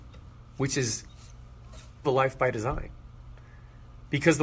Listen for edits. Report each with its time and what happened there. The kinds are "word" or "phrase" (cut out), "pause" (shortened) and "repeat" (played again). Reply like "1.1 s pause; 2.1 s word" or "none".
2.0 s word

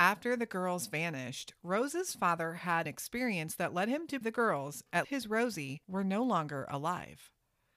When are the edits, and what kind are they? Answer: 2.8 s word; 4.2 s word; 5.0 s word; 5.8 s pause

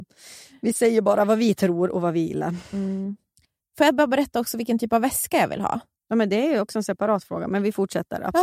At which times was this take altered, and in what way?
3.4 s pause

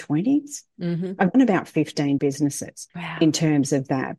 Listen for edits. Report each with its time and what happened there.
1.3 s word; 2.2 s word; 2.9 s pause

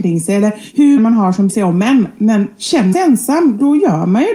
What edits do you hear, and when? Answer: 1.0 s word; 1.5 s word; 2.9 s word

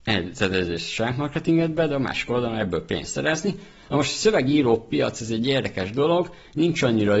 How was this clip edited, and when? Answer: none

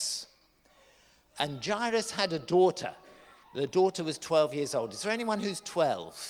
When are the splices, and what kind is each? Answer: 3.4 s pause

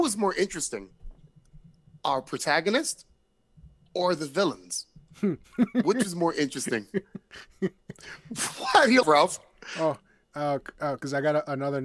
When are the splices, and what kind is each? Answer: 9.0 s word

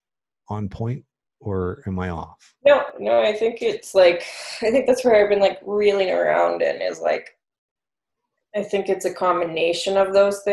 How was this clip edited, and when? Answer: none

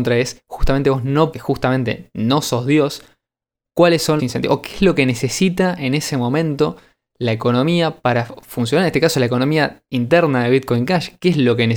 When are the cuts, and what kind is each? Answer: 1.3 s phrase; 4.2 s word

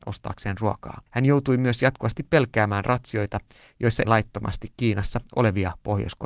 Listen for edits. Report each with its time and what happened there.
1.1 s pause; 4.0 s word

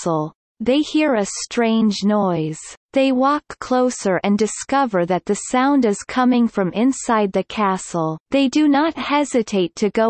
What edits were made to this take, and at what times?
2.8 s pause; 8.2 s pause

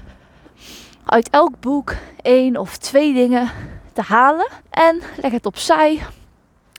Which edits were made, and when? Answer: 4.6 s pause

